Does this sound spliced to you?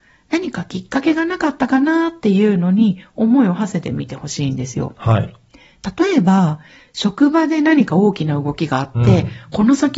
no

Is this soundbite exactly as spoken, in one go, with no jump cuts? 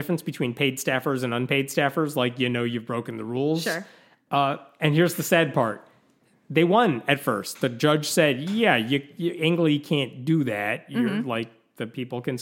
yes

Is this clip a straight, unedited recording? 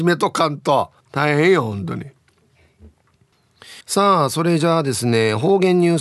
no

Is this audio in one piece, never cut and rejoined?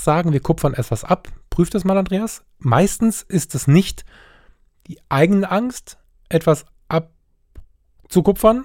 yes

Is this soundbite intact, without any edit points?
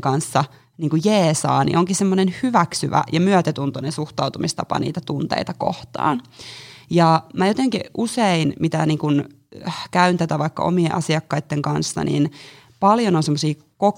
yes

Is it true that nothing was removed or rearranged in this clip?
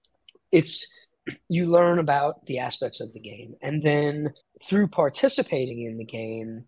no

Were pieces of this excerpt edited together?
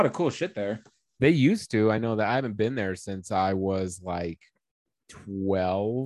no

